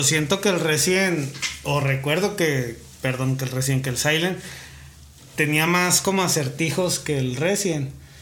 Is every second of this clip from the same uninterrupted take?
yes; 0 cuts

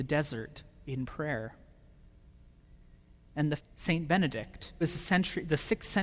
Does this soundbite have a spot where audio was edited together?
yes; 2 cuts; at 3.6 s, 4.8 s

